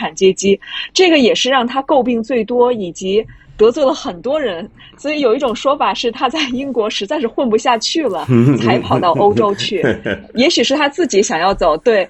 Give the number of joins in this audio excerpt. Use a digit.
0